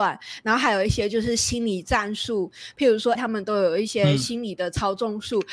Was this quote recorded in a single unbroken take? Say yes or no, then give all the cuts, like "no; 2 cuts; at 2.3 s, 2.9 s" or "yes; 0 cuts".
no; 1 cut; at 3.2 s